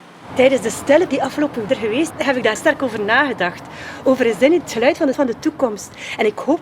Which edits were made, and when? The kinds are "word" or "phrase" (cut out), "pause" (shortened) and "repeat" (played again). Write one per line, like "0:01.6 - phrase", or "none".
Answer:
0:01.1 - word
0:01.7 - word
0:02.1 - word
0:02.6 - word
0:04.6 - word
0:05.1 - word